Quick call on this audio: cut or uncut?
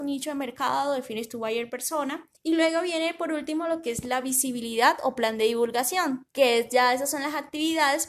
cut